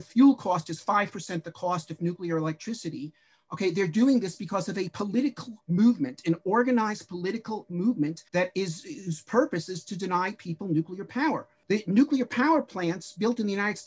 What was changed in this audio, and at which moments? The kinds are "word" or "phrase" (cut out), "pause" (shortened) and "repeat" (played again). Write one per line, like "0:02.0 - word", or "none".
0:08.3 - pause